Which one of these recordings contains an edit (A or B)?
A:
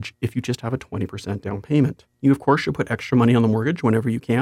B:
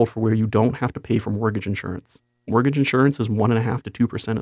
A